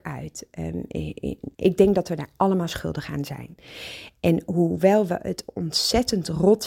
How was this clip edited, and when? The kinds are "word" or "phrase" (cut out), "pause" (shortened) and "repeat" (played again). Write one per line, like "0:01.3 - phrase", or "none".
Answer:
0:01.5 - pause